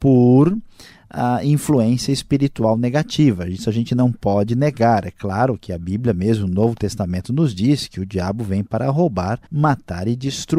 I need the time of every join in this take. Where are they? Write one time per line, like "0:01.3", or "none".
0:09.5